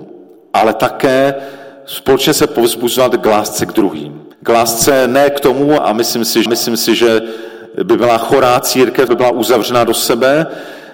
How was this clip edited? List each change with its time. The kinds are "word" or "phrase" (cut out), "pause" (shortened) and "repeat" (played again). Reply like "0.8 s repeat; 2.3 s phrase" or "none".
4.3 s pause; 5.8 s word; 6.5 s repeat; 9.1 s word